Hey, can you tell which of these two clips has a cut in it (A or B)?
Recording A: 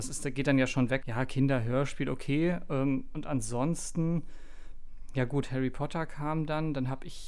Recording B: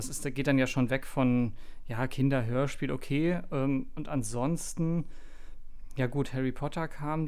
A